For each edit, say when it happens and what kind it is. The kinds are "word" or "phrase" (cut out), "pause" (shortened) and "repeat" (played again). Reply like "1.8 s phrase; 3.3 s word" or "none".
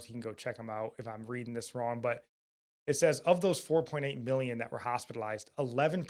none